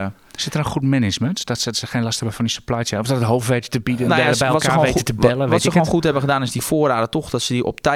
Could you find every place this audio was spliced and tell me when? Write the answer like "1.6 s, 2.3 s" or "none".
1.7 s, 4.1 s